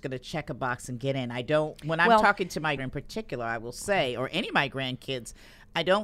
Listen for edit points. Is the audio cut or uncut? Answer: cut